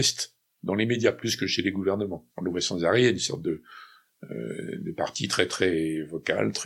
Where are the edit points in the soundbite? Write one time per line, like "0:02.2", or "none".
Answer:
0:02.3